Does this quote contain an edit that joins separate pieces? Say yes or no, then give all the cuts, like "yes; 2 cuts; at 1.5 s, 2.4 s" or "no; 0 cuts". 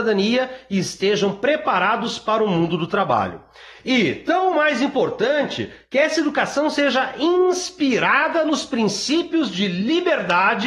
no; 0 cuts